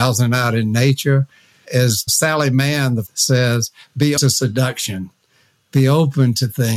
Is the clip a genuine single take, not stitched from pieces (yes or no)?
no